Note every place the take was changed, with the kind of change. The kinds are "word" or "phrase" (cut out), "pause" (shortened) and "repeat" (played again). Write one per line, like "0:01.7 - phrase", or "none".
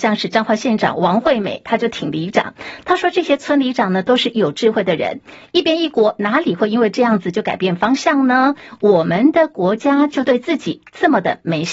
none